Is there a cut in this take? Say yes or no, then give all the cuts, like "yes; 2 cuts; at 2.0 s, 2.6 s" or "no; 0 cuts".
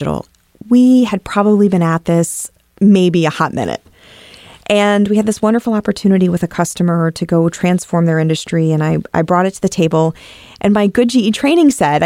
no; 0 cuts